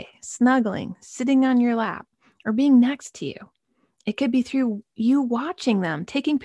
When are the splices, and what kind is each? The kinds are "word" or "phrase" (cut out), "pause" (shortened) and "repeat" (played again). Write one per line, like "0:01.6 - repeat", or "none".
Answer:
none